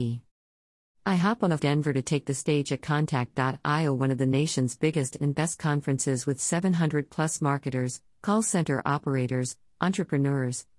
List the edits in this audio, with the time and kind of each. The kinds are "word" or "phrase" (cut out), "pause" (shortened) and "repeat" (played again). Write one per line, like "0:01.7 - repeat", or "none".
0:01.6 - phrase